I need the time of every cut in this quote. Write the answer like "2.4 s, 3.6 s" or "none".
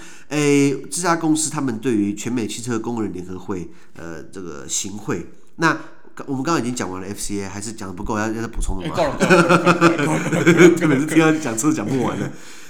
none